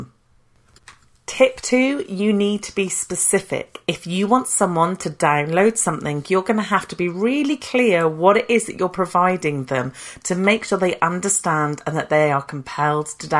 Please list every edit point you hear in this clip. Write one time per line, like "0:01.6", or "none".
none